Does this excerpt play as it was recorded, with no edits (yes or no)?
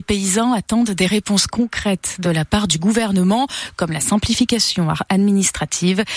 yes